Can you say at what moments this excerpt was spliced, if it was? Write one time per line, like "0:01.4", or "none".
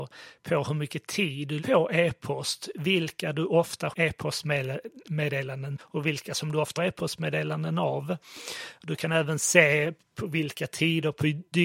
0:01.6
0:03.9
0:05.8
0:06.8